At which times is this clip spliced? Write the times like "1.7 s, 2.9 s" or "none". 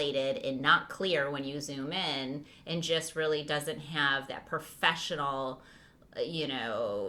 none

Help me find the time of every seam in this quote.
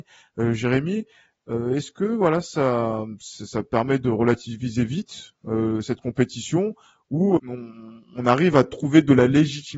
7.4 s

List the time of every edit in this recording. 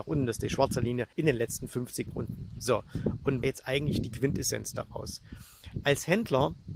1.1 s, 2.1 s, 3.4 s

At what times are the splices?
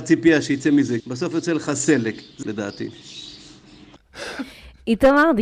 1.0 s, 2.4 s

